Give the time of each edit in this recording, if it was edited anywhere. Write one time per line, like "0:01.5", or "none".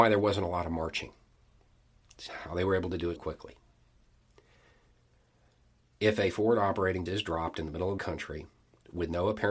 0:03.2
0:07.1
0:08.0